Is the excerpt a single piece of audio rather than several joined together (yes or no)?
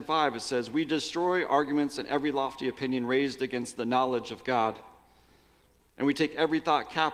yes